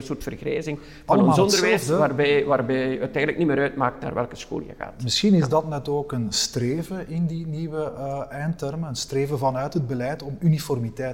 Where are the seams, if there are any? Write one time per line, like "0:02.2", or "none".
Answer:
none